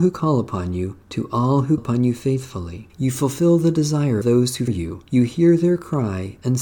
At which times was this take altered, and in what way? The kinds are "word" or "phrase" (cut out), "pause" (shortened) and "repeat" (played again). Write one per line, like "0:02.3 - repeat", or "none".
0:01.0 - pause
0:01.8 - word
0:02.9 - pause
0:04.2 - word
0:04.7 - word
0:05.1 - pause